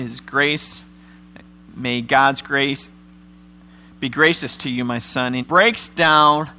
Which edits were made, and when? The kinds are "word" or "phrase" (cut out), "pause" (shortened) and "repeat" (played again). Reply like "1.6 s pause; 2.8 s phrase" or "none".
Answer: 5.4 s word